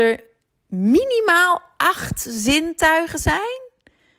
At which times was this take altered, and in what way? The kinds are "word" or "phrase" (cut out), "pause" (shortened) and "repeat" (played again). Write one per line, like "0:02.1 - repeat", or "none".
none